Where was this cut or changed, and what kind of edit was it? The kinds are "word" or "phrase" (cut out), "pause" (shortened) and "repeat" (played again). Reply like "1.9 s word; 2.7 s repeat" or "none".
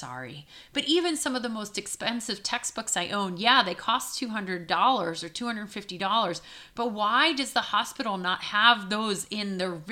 none

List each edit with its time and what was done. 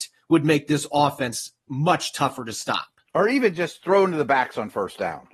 3.0 s pause

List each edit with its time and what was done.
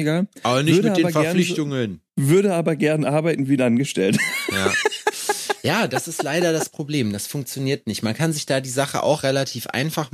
2.1 s pause

